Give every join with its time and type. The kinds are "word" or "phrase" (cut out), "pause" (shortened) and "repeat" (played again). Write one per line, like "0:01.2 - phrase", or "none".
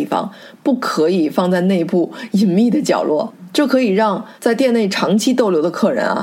0:04.4 - pause